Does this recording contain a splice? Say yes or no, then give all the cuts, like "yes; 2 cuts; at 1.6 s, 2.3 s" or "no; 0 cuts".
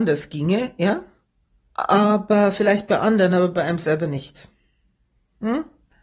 no; 0 cuts